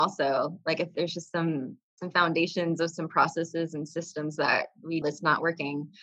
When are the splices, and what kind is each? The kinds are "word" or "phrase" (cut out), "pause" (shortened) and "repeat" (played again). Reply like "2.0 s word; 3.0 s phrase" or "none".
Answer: 0.9 s word; 1.8 s pause; 5.0 s phrase